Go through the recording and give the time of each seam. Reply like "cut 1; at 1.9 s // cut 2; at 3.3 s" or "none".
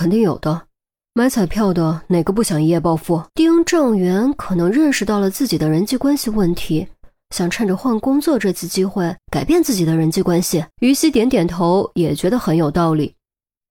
cut 1; at 3.3 s // cut 2; at 9.2 s // cut 3; at 10.7 s